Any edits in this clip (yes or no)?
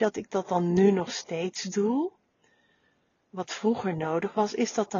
no